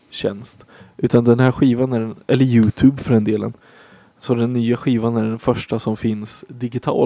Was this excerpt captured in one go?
yes; 0 cuts

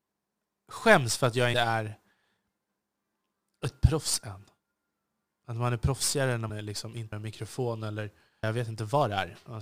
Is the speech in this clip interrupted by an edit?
yes; 4 cuts; at 1.5 s, 6.5 s, 7.1 s, 8.4 s

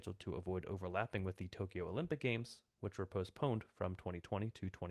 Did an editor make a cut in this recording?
no; 0 cuts

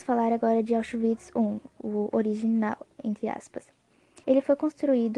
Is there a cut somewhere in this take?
yes; 1 cut; at 4.2 s

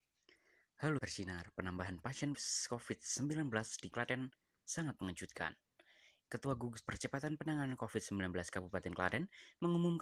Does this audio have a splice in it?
yes; 4 cuts; at 1.0 s, 2.3 s, 3.9 s, 6.9 s

